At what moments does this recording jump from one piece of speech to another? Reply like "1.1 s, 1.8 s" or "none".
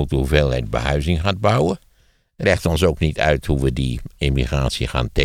2.4 s